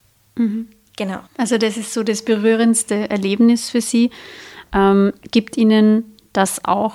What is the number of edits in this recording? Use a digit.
1